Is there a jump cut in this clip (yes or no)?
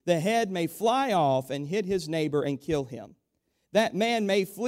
no